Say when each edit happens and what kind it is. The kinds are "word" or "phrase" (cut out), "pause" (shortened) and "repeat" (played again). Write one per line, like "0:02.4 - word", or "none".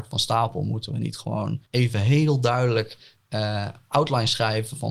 0:01.7 - pause